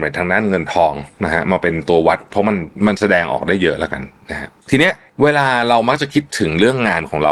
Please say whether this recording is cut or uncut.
uncut